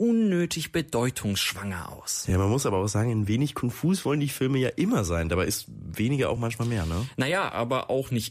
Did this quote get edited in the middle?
no; 0 cuts

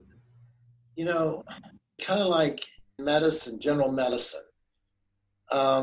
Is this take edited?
yes; 2 cuts; at 2.0 s, 3.0 s

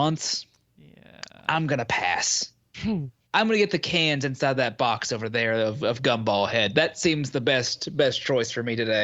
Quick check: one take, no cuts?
no; 1 cut; at 3.2 s

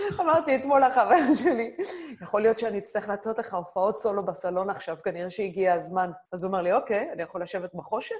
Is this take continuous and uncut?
no; 1 cut; at 6.3 s

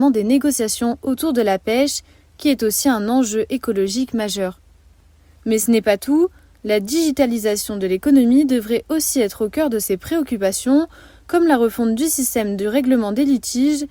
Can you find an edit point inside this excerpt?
no; 0 cuts

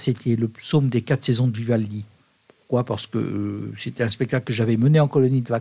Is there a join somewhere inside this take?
no; 0 cuts

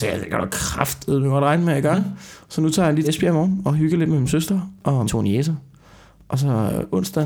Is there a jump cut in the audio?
yes; 2 cuts; at 3.0 s, 5.1 s

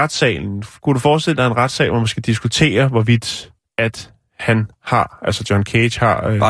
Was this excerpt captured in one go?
no; 1 cut; at 3.6 s

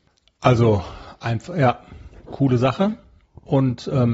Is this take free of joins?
yes; 0 cuts

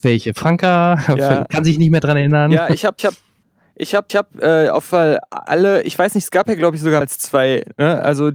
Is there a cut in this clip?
yes; 4 cuts; at 3.0 s, 4.1 s, 4.8 s, 7.0 s

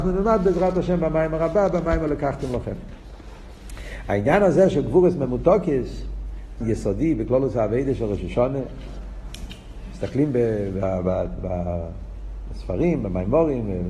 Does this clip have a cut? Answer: yes; 1 cut; at 6.6 s

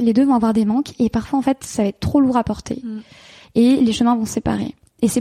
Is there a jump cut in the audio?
no; 0 cuts

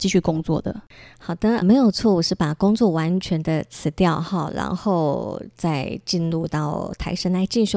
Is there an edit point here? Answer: yes; 1 cut; at 1.6 s

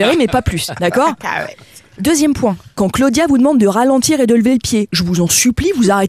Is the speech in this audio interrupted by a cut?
no; 0 cuts

